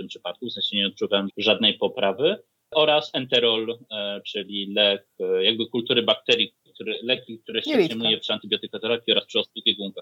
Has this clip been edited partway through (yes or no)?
yes